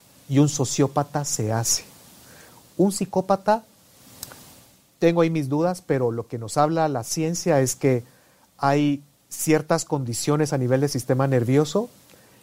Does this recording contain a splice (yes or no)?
no